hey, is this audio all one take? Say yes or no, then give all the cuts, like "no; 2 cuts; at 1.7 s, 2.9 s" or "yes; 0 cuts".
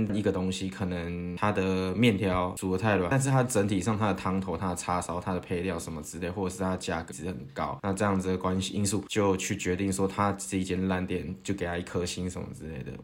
no; 1 cut; at 7.1 s